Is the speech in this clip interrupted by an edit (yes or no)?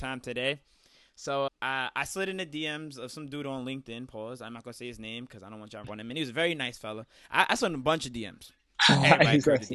yes